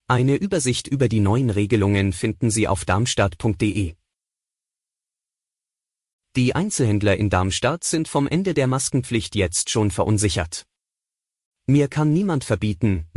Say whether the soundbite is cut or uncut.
uncut